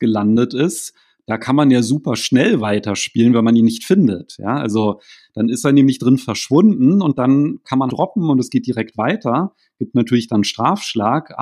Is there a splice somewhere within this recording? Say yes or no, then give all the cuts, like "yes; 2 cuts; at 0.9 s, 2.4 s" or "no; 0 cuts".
yes; 1 cut; at 7.9 s